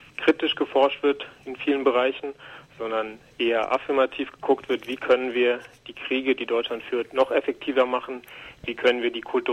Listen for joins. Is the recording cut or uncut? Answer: uncut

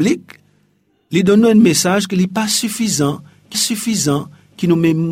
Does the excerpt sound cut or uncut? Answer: cut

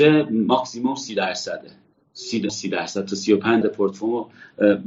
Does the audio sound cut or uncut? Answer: cut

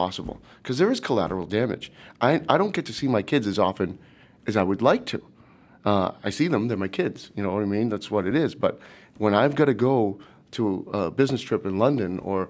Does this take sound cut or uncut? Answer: uncut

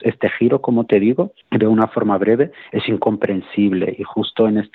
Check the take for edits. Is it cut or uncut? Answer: cut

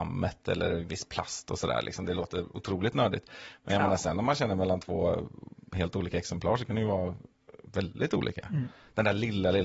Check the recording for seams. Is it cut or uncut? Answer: uncut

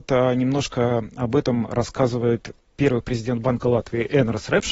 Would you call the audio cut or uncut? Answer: uncut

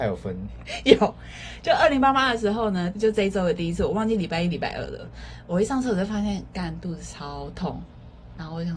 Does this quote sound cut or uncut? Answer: cut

